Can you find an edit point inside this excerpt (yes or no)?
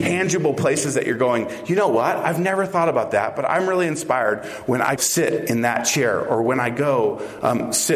yes